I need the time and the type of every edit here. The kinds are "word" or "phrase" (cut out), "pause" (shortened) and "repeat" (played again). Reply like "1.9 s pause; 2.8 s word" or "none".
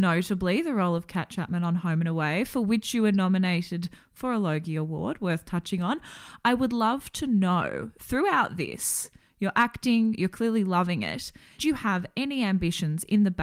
11.6 s word